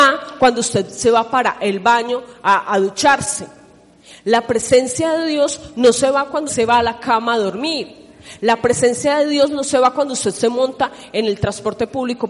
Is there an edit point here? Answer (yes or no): yes